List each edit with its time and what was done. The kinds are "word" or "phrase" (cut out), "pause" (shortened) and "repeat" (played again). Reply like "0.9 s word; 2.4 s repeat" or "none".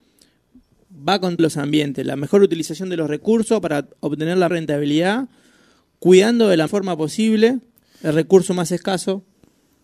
1.4 s word; 4.5 s word; 6.7 s word